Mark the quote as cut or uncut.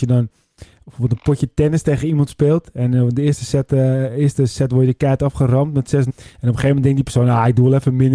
cut